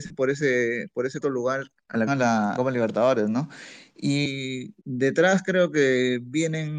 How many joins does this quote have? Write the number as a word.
five